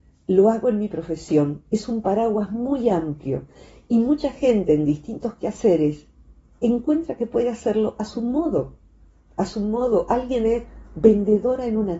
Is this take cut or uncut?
uncut